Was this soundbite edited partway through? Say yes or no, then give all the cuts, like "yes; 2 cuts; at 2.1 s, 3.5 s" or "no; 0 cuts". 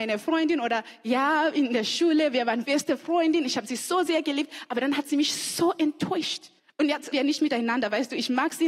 yes; 3 cuts; at 2.6 s, 6.6 s, 7.1 s